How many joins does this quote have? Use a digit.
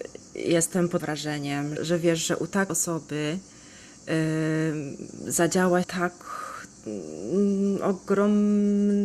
4